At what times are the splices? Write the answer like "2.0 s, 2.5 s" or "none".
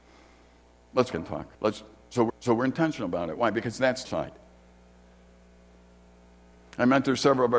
1.1 s, 1.5 s, 2.3 s, 4.0 s